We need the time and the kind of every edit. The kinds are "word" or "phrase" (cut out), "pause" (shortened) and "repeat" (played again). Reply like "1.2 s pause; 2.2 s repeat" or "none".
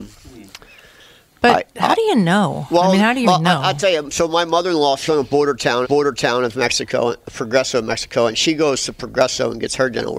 3.2 s word; 5.1 s word; 5.8 s repeat